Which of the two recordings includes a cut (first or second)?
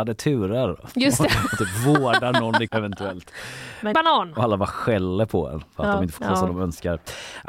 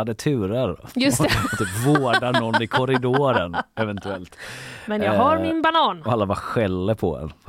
first